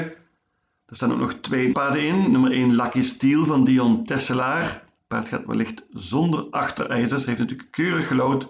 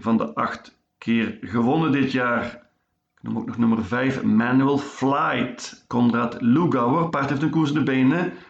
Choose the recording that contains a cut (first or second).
first